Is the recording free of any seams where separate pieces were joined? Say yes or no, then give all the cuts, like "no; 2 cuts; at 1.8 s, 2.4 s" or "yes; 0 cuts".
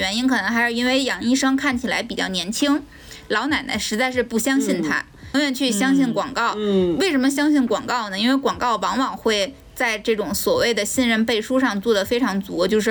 no; 1 cut; at 5.3 s